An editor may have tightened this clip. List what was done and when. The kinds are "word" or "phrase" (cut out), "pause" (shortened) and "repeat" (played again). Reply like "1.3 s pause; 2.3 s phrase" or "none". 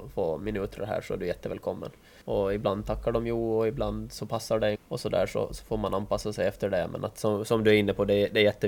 2.2 s pause; 4.8 s phrase